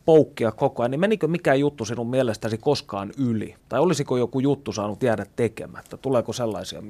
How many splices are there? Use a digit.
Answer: 1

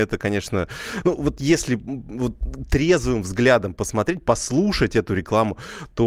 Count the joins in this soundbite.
1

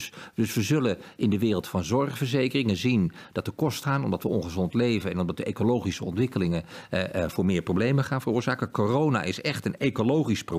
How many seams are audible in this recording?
1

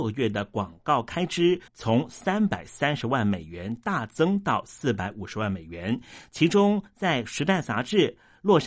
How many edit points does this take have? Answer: 1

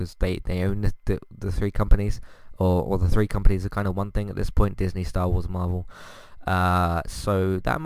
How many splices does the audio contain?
0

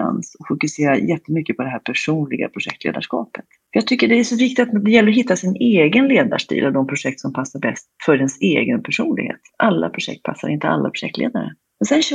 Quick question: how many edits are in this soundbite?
0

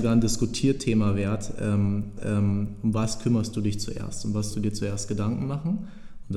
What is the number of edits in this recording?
2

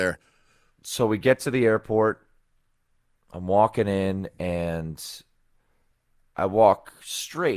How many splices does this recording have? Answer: 0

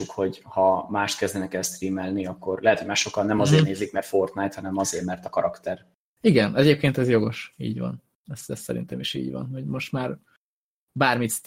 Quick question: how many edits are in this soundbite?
0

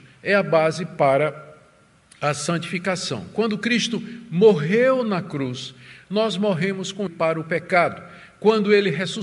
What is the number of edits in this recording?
1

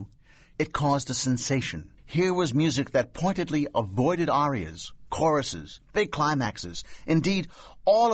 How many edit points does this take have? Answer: 1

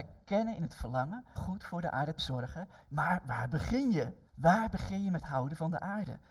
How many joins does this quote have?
3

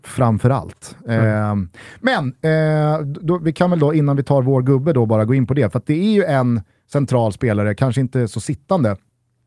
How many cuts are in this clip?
0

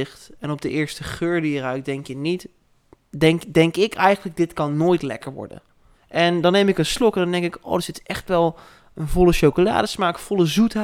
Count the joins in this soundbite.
0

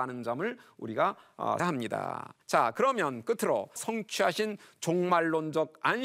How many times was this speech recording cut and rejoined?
3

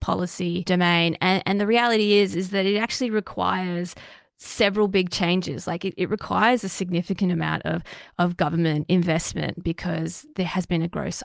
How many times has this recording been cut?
0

